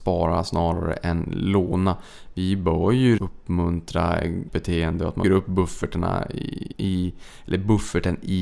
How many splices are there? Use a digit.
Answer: 4